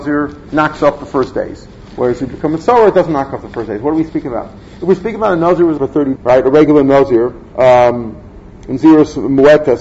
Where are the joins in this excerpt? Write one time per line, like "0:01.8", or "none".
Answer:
0:05.8
0:06.2
0:07.5